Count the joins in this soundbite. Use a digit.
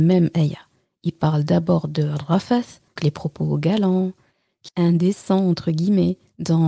2